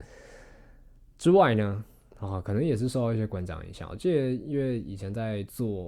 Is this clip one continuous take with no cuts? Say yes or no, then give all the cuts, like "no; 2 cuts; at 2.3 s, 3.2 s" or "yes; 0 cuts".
yes; 0 cuts